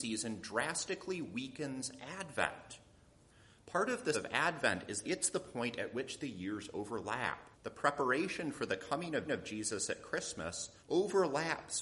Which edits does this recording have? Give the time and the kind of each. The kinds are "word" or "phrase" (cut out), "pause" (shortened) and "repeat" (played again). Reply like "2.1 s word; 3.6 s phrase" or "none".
4.1 s word; 5.0 s word; 7.5 s pause; 9.3 s repeat; 10.8 s pause